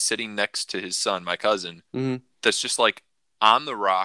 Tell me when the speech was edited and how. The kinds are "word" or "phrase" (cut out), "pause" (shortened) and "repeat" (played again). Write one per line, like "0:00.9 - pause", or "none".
0:01.9 - pause